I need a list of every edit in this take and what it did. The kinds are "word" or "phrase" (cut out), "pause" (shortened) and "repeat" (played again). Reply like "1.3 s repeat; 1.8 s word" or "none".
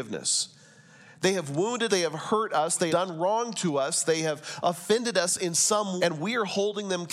1.9 s word; 2.9 s word; 6.0 s word